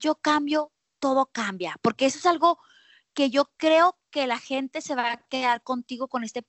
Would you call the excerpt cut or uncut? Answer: uncut